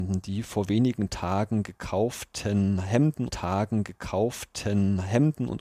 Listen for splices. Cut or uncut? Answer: cut